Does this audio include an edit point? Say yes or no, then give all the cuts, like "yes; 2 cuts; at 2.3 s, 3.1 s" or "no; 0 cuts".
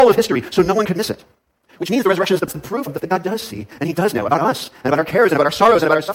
yes; 2 cuts; at 2.5 s, 3.0 s